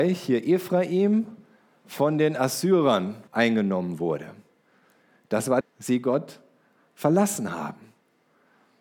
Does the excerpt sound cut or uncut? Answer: cut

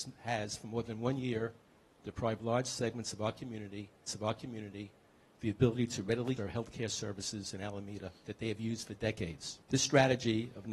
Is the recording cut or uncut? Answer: cut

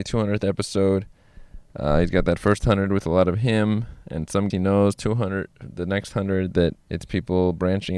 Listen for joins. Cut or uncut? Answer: cut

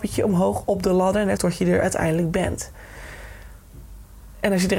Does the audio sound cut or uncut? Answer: cut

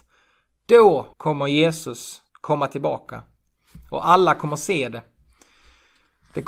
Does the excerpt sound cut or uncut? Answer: cut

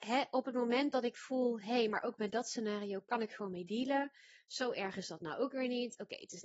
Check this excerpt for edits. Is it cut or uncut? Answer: uncut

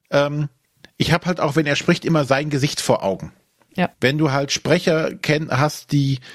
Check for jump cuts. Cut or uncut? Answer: cut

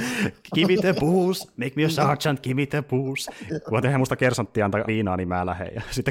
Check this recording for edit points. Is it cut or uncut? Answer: cut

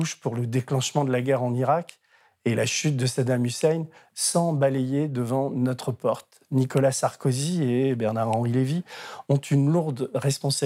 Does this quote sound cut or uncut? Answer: uncut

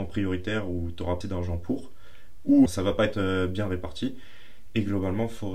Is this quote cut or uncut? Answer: cut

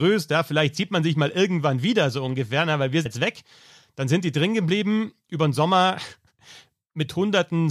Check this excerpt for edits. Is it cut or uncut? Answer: cut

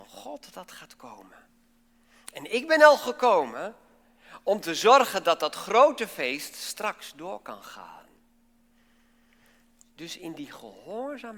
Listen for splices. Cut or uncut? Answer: uncut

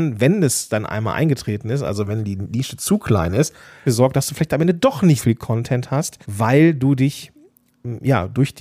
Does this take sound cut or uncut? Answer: cut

